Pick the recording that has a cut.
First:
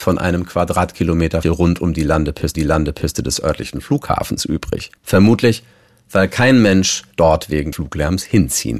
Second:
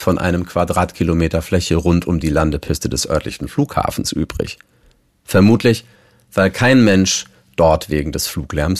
first; 5 cuts; at 1.4 s, 2.5 s, 5.0 s, 7.1 s, 7.7 s

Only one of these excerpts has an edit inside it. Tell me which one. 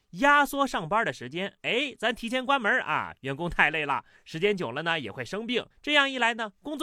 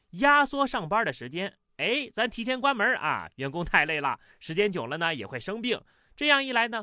first; 2 cuts; at 1.6 s, 5.7 s

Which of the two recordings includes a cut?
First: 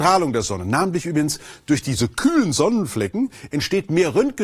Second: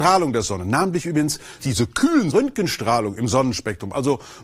second; 2 cuts; at 1.6 s, 2.3 s

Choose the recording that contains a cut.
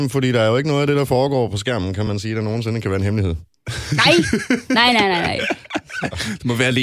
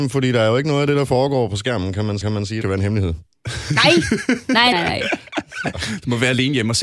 second; 3 cuts; at 2.2 s, 2.6 s, 4.7 s

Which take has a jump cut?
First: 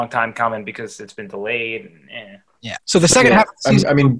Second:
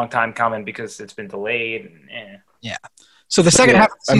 first; 1 cut; at 2.8 s

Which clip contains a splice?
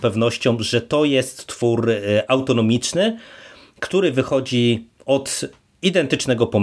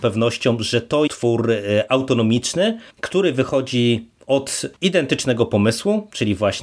second; 3 cuts; at 1.1 s, 2.9 s, 4.8 s

